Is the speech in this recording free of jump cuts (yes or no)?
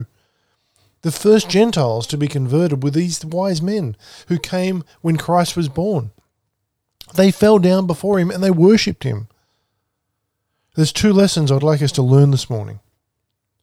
yes